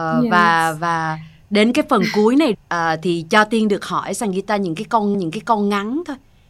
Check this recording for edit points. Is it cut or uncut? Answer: cut